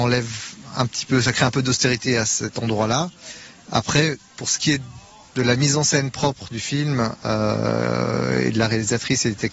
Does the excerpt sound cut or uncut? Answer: uncut